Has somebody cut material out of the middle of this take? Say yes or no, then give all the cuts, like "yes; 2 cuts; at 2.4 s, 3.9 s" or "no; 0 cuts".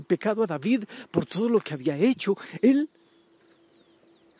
no; 0 cuts